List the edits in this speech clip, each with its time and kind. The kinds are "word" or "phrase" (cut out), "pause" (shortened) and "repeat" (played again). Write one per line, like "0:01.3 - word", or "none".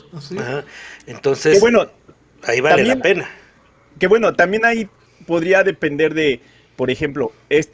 none